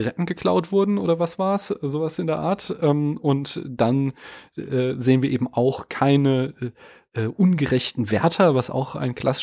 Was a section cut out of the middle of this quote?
no; 0 cuts

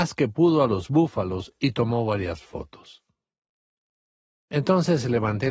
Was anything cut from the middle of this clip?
no; 0 cuts

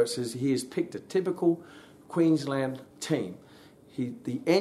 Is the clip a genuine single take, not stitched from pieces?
no; 1 cut; at 2.9 s

